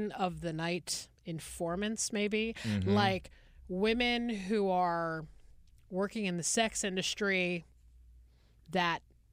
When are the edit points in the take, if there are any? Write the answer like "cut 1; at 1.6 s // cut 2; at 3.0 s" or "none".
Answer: cut 1; at 1.2 s